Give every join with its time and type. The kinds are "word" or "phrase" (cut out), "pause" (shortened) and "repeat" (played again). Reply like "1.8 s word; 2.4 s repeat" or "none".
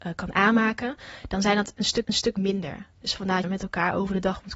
2.0 s repeat; 3.4 s phrase